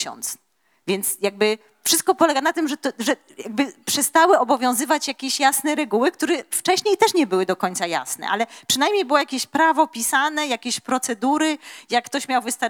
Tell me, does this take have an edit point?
no; 0 cuts

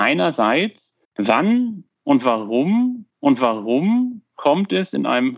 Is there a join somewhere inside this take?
yes; 2 cuts; at 1.0 s, 3.1 s

